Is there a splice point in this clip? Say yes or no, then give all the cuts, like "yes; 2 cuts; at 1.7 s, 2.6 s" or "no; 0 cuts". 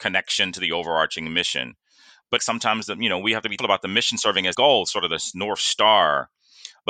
yes; 3 cuts; at 2.4 s, 3.6 s, 4.5 s